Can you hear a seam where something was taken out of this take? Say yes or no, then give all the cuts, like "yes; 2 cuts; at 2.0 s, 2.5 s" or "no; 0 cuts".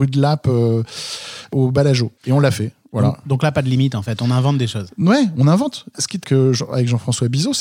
yes; 2 cuts; at 2.2 s, 6.2 s